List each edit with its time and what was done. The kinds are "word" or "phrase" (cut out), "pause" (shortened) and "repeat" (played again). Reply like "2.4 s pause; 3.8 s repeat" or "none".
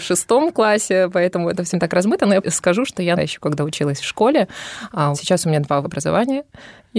1.7 s word; 2.4 s word; 3.2 s word; 5.1 s word; 5.8 s word